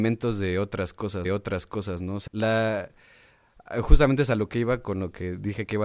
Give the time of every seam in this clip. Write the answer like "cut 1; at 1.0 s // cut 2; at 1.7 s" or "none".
cut 1; at 1.2 s // cut 2; at 2.3 s

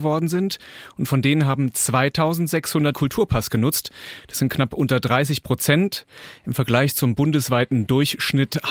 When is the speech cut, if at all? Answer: cut 1; at 2.9 s

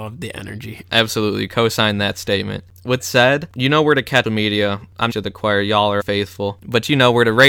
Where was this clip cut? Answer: cut 1; at 3.0 s // cut 2; at 4.2 s // cut 3; at 5.1 s // cut 4; at 6.0 s

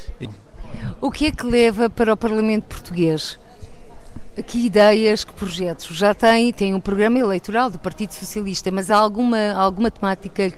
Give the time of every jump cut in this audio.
none

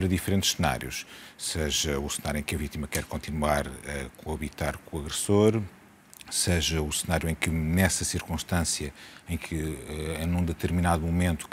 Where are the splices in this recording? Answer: none

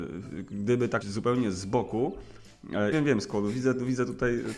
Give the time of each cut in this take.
cut 1; at 1.0 s // cut 2; at 2.9 s

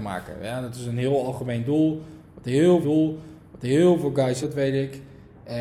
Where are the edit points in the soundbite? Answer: cut 1; at 2.8 s // cut 2; at 4.4 s

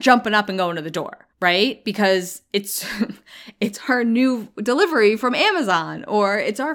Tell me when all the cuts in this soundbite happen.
cut 1; at 1.3 s

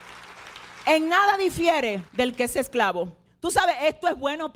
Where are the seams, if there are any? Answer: cut 1; at 2.1 s // cut 2; at 3.3 s

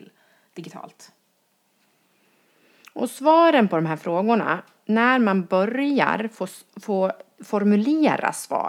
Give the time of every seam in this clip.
none

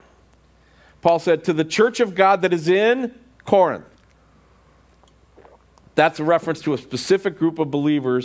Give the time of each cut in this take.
none

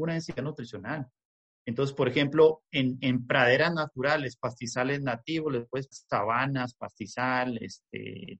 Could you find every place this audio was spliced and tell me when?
cut 1; at 3.0 s // cut 2; at 5.9 s

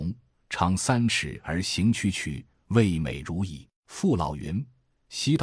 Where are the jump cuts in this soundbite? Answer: cut 1; at 3.8 s

